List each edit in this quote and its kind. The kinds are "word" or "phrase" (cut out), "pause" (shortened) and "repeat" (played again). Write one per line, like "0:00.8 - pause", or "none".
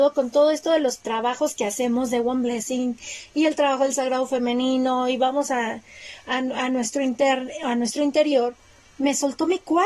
none

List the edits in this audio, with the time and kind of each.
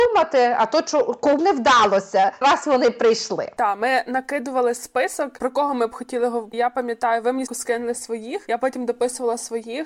0:01.4 - word
0:02.4 - word
0:06.5 - word
0:07.5 - word

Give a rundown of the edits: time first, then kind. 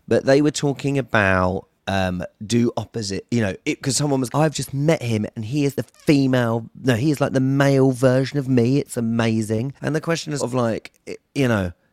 0:01.8 - pause
0:03.6 - pause
0:04.3 - word
0:05.8 - word
0:09.8 - pause
0:10.4 - word

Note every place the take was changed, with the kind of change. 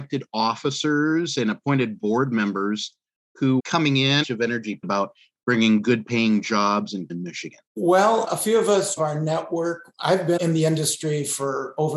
0:03.6 - word
0:04.2 - phrase
0:04.8 - word
0:07.1 - phrase
0:07.7 - pause
0:09.0 - phrase

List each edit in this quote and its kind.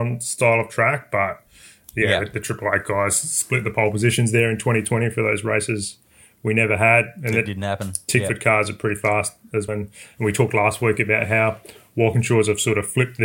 0:09.7 - word

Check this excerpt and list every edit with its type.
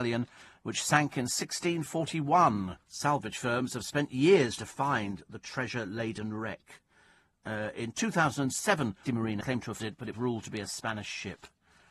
0:02.8 - pause
0:04.6 - word
0:09.1 - word
0:09.4 - word
0:09.8 - word
0:10.1 - word

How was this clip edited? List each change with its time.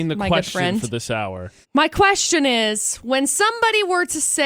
0:01.6 - pause

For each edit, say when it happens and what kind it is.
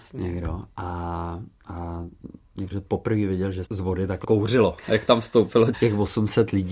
0:02.7 - word
0:03.7 - word
0:04.2 - word
0:05.7 - word

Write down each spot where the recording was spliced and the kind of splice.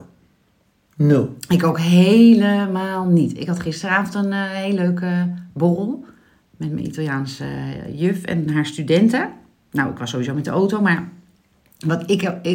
none

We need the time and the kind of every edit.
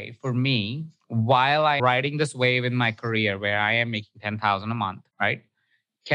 0:01.8 - word
0:05.1 - pause

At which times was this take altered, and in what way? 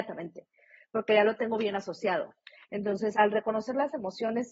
0:03.1 - word

